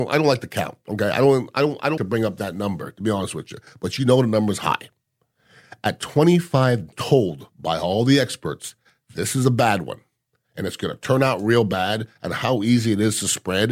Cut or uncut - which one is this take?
cut